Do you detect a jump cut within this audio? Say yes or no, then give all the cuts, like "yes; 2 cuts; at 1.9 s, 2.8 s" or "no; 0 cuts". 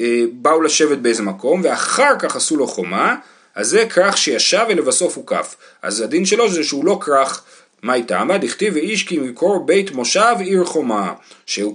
no; 0 cuts